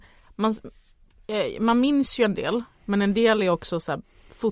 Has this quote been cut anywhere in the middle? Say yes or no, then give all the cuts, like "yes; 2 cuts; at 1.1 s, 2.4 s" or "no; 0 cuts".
no; 0 cuts